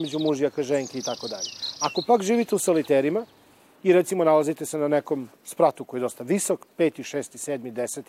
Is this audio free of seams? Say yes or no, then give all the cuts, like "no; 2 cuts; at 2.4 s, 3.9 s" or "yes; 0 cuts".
yes; 0 cuts